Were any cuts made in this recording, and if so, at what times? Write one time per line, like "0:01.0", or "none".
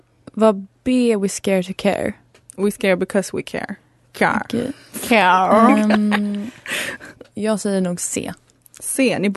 none